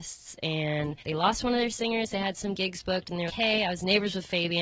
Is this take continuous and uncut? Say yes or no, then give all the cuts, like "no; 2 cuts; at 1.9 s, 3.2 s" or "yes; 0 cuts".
no; 2 cuts; at 1.0 s, 3.3 s